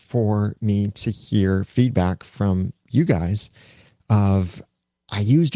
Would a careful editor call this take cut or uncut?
uncut